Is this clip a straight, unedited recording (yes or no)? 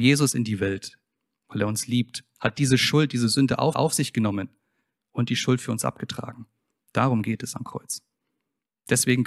no